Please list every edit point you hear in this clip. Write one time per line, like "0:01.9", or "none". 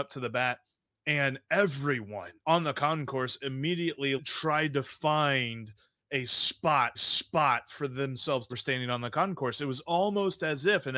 0:02.4
0:04.2
0:06.9
0:08.5